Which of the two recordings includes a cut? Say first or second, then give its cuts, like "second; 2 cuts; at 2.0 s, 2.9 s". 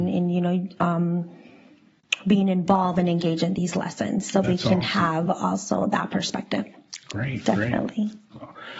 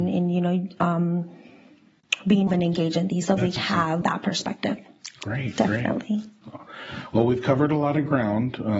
second; 4 cuts; at 2.5 s, 3.3 s, 3.6 s, 4.0 s